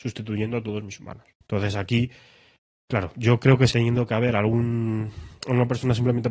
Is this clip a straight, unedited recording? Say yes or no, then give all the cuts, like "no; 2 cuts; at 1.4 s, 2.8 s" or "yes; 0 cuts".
no; 2 cuts; at 1.3 s, 3.7 s